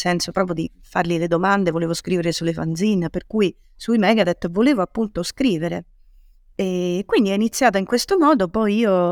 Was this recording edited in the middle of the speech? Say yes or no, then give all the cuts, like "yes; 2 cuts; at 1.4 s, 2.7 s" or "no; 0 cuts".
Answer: yes; 1 cut; at 3.6 s